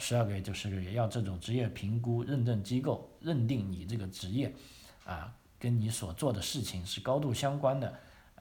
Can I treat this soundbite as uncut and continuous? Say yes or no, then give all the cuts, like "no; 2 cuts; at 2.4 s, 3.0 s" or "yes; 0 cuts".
yes; 0 cuts